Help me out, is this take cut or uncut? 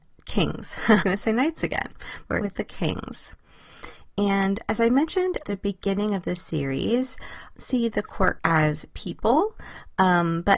cut